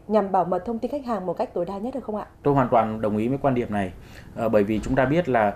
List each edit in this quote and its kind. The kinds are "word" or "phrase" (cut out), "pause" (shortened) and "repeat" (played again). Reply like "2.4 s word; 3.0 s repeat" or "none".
2.3 s pause